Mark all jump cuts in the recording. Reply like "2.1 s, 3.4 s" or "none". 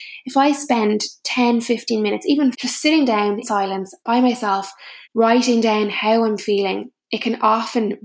2.5 s, 3.4 s, 4.0 s, 5.0 s

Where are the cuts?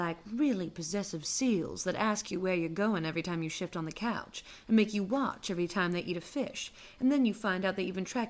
none

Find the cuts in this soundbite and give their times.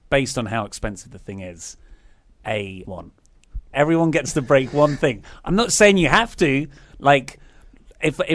2.8 s, 3.7 s

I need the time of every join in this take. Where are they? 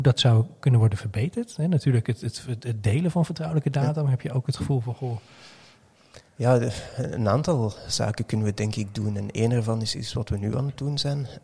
6.3 s

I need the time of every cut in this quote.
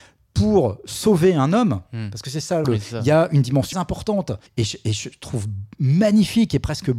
2.6 s, 3.7 s, 4.5 s

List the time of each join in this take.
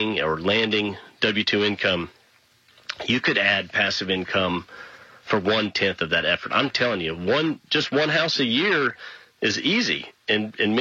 none

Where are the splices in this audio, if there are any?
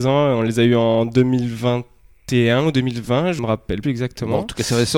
3.4 s, 3.8 s

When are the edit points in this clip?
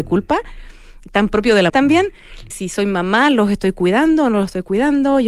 1.7 s, 2.5 s

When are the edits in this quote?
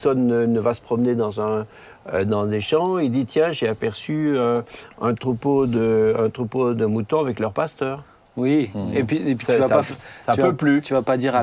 none

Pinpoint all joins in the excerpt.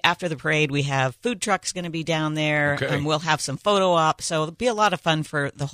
none

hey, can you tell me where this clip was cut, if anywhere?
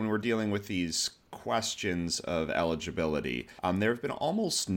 3.6 s

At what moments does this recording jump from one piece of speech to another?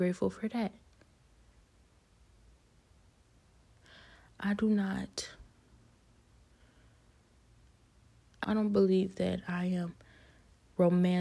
8.4 s

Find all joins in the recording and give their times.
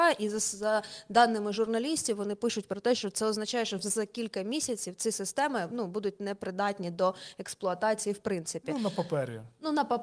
none

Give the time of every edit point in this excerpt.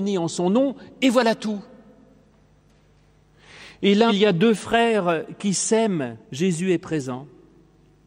4.1 s, 6.2 s

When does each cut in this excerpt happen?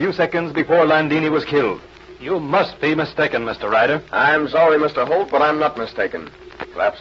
none

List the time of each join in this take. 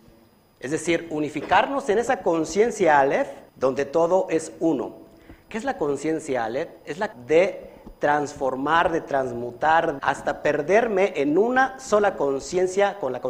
3.5 s, 7.1 s, 10.0 s

